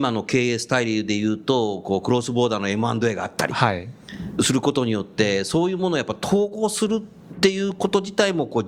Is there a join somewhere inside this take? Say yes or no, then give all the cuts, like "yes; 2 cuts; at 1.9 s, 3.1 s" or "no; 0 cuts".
no; 0 cuts